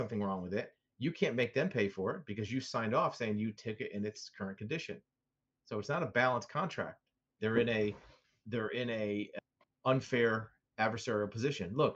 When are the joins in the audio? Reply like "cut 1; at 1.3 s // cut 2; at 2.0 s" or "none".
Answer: cut 1; at 7.4 s

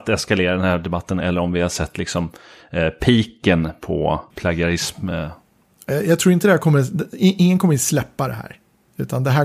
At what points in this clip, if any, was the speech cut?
cut 1; at 4.3 s

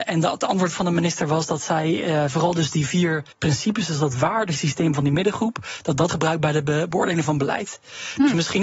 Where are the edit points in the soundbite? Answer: cut 1; at 3.3 s // cut 2; at 6.1 s

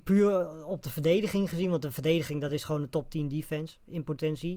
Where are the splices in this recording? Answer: none

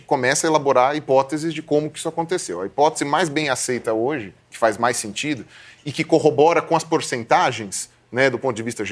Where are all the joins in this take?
none

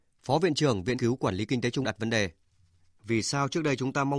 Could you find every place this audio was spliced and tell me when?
cut 1; at 0.9 s // cut 2; at 1.8 s

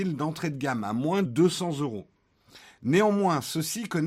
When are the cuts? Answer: cut 1; at 1.2 s

